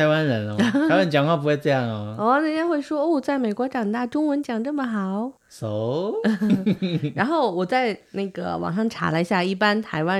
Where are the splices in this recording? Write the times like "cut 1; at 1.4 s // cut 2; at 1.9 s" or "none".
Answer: cut 1; at 5.4 s